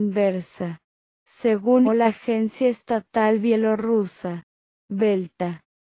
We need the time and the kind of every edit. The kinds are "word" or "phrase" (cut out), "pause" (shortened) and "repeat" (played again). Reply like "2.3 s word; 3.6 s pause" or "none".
1.8 s word